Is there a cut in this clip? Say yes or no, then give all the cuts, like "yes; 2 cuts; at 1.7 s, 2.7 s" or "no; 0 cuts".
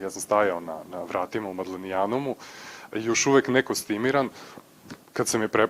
no; 0 cuts